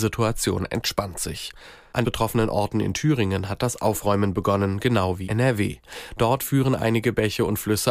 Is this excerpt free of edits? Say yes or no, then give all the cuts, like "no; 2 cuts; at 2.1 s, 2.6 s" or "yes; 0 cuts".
no; 2 cuts; at 2.0 s, 5.3 s